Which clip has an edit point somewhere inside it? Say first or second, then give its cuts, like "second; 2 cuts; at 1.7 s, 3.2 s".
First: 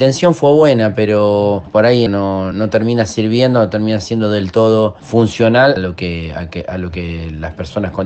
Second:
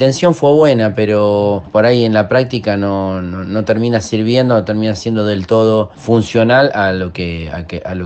first; 3 cuts; at 2.1 s, 2.5 s, 5.8 s